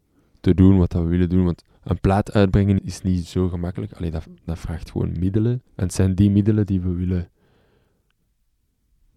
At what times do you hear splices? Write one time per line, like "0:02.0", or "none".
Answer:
0:01.7
0:02.8
0:05.7